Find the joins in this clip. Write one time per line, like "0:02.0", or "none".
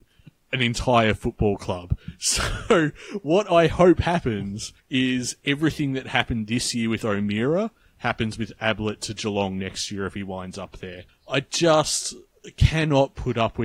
0:04.8
0:11.1